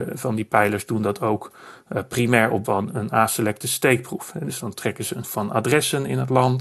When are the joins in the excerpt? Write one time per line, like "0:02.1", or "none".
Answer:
0:02.6
0:05.2